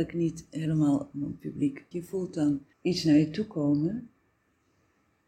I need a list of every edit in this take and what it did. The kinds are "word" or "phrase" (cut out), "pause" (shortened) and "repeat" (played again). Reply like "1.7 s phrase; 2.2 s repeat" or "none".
1.1 s word; 1.9 s phrase; 2.7 s pause